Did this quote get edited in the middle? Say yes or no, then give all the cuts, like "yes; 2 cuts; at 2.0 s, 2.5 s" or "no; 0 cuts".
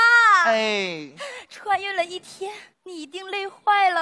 yes; 1 cut; at 2.7 s